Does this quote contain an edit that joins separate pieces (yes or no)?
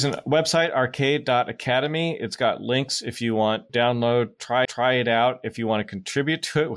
yes